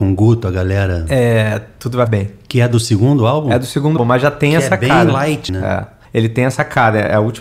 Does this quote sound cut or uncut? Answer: cut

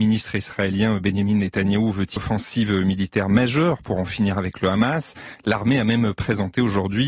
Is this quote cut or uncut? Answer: cut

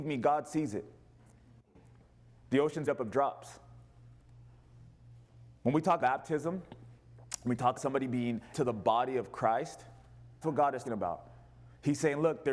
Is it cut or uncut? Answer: cut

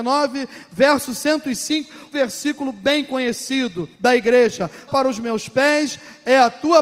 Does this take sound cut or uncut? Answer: cut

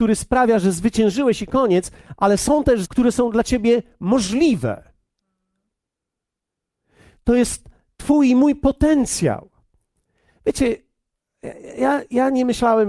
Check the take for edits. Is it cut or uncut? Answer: cut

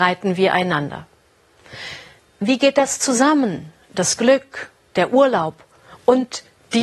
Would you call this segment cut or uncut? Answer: uncut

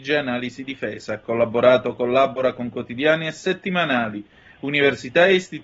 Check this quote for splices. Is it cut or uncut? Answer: uncut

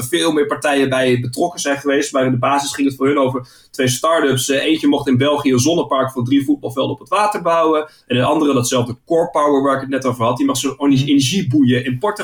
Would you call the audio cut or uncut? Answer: uncut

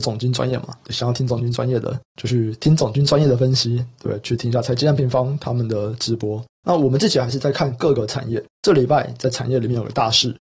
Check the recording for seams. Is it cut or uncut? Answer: uncut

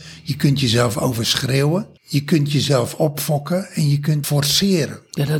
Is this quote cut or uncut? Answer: cut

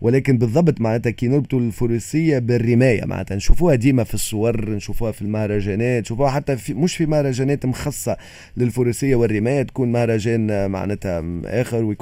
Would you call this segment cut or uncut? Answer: uncut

